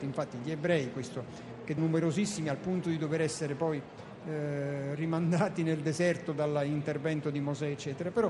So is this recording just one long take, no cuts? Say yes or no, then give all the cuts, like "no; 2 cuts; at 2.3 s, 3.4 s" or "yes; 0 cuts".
no; 1 cut; at 1.8 s